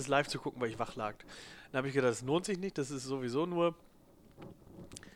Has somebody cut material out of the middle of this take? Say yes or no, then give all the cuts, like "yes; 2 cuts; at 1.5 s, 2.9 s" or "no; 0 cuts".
no; 0 cuts